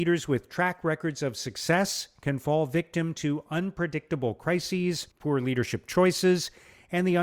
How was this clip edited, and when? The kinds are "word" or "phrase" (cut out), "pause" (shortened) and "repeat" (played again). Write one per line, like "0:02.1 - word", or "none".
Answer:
0:05.1 - pause

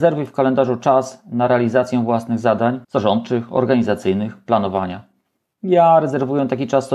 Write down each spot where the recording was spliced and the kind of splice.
0:02.8 - pause

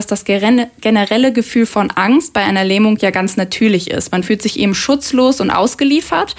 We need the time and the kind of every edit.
none

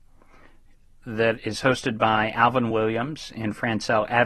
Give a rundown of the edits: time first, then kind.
none

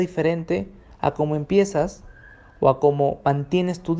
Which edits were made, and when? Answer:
none

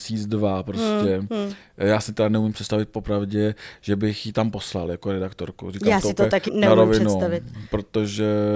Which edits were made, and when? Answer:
0:06.5 - word

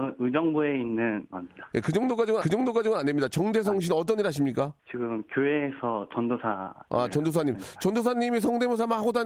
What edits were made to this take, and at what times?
0:01.3 - word
0:02.4 - repeat
0:04.8 - pause

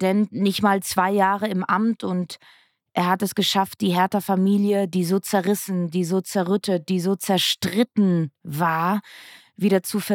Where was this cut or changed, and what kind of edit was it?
none

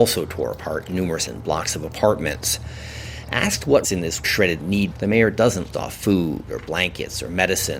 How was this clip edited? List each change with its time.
0:01.3 - word
0:03.8 - word
0:04.2 - word
0:04.6 - word
0:04.9 - word
0:05.7 - word

